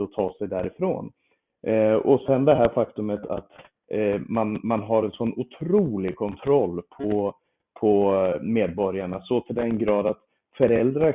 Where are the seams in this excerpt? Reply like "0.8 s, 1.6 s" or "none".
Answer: none